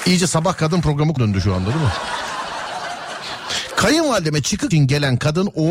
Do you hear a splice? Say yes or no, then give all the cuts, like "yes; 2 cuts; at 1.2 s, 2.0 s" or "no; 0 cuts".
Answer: yes; 2 cuts; at 1.2 s, 4.7 s